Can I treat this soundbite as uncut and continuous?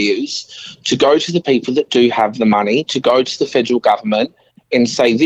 yes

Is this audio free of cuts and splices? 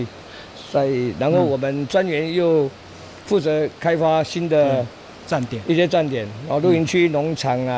yes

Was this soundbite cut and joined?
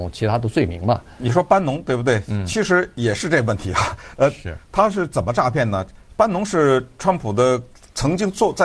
no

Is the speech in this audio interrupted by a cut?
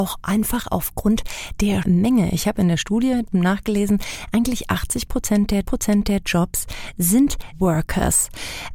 yes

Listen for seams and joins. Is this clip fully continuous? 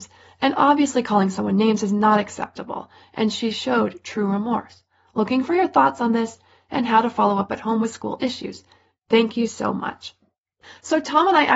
yes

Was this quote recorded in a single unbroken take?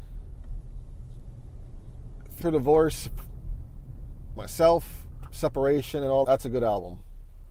no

